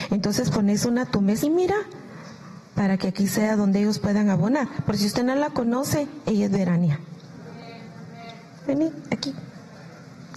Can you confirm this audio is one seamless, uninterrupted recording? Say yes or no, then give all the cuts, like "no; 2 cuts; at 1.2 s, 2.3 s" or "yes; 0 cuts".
no; 1 cut; at 1.4 s